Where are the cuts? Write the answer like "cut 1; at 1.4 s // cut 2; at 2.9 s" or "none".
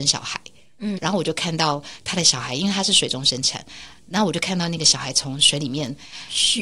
cut 1; at 1.0 s